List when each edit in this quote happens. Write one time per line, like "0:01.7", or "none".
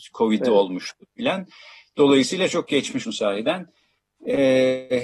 0:03.0